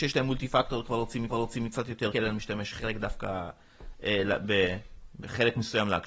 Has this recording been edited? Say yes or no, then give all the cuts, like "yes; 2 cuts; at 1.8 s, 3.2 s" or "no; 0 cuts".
yes; 2 cuts; at 1.3 s, 2.1 s